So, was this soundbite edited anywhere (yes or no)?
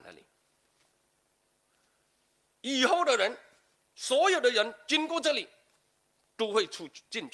no